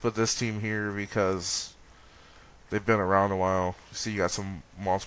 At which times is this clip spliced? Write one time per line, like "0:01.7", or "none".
none